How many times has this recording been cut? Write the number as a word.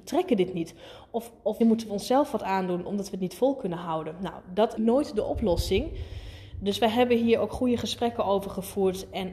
two